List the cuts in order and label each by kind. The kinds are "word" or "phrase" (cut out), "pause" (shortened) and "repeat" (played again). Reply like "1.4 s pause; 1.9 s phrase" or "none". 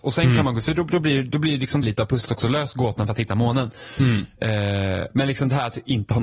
1.8 s word